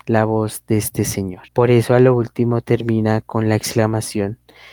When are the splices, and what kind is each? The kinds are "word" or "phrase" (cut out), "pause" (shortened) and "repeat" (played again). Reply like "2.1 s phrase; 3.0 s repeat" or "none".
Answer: 1.5 s pause